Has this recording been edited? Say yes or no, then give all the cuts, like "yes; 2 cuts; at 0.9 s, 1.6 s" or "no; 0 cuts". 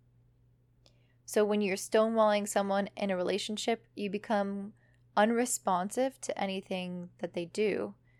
no; 0 cuts